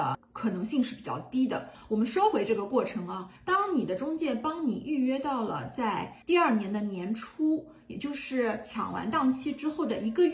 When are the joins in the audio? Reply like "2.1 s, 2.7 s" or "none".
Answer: 3.4 s, 6.2 s